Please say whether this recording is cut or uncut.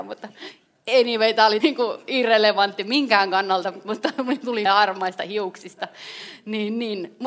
cut